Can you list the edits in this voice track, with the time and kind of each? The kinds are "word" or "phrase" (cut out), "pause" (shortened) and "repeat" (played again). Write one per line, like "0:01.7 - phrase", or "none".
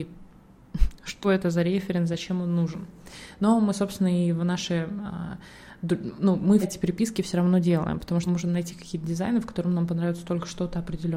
0:01.2 - word
0:06.6 - word
0:08.3 - word